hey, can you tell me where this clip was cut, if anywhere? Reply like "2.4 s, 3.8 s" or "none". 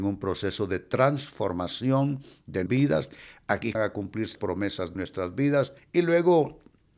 2.7 s, 3.7 s, 4.3 s, 5.0 s, 5.8 s

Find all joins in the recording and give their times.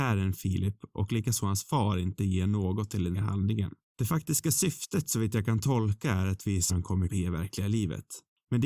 3.1 s, 6.7 s, 7.1 s

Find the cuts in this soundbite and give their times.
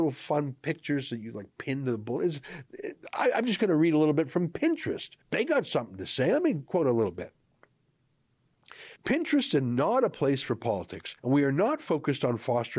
5.2 s, 9.0 s, 11.2 s

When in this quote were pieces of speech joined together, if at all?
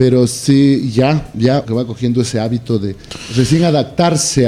1.6 s

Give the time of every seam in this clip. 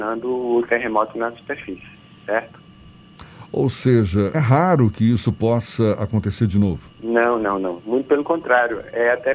4.3 s, 7.0 s

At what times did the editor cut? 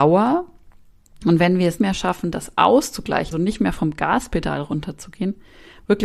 1.8 s, 3.3 s

